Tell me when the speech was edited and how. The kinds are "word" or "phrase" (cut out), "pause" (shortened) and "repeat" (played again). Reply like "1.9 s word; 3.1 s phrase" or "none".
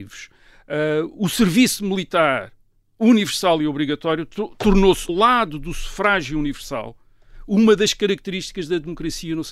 5.1 s word